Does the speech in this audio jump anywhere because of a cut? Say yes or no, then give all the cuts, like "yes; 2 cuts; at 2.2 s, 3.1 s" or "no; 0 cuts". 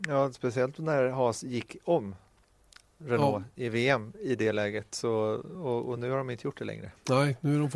no; 0 cuts